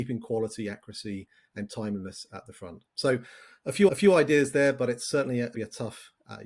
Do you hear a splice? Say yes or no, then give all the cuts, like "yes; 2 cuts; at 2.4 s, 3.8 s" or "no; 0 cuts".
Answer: yes; 2 cuts; at 3.9 s, 5.5 s